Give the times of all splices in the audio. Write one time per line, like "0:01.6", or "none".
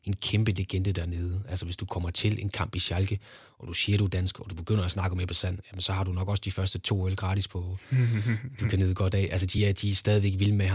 none